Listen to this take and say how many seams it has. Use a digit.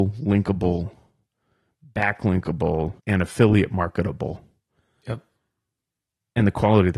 1